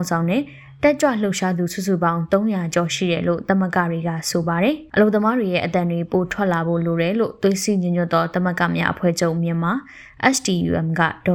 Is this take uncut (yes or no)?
yes